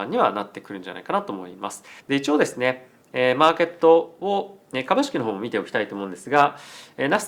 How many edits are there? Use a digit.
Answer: 1